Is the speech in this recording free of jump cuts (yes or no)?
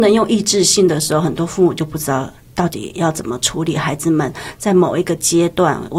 yes